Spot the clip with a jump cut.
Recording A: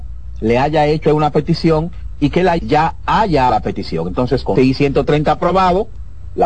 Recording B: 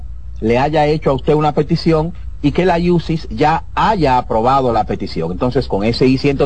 A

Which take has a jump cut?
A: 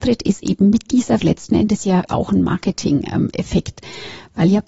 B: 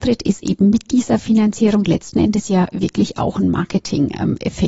A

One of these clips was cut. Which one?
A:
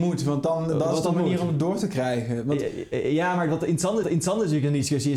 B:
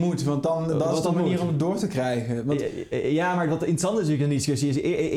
A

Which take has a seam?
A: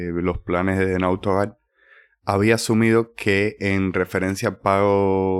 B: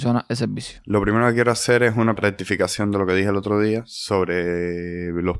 B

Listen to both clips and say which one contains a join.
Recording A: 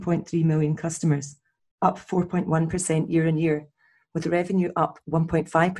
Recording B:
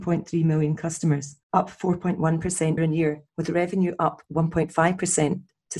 B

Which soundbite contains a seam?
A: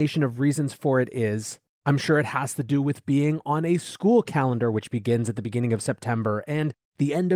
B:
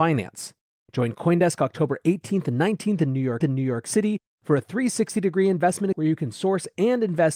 B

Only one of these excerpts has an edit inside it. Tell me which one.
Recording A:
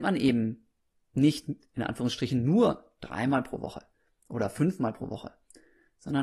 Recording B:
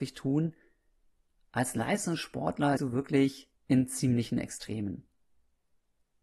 B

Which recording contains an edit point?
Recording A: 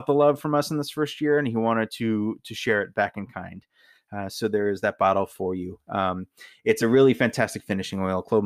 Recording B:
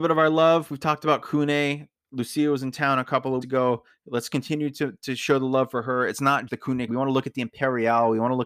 B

